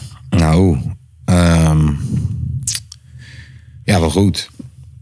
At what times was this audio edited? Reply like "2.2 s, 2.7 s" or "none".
none